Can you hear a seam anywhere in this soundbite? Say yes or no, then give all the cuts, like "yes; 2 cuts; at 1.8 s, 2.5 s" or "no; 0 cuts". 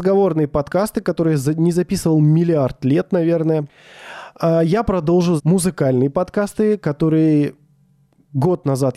yes; 1 cut; at 5.4 s